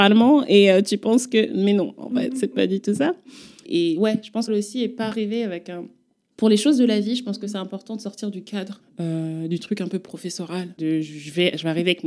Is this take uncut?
no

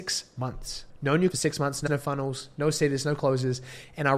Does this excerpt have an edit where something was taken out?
yes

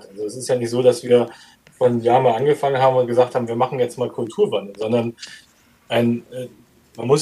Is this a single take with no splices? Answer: yes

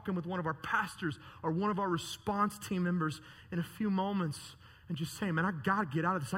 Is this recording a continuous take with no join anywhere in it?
yes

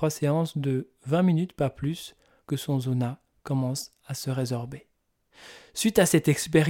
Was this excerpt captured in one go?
no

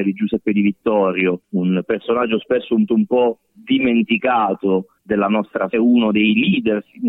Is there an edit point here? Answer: yes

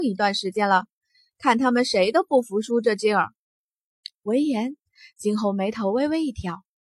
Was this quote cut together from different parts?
no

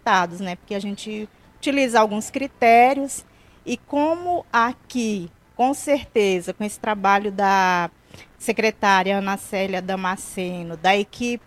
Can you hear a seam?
no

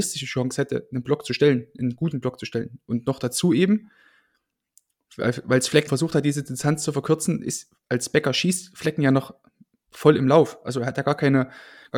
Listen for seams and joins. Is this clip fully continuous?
no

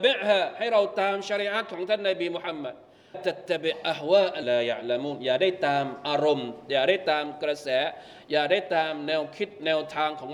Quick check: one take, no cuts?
no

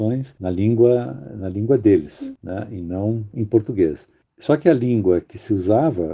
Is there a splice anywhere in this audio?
no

